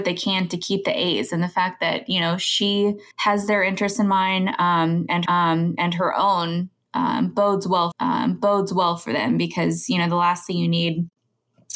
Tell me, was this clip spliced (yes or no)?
yes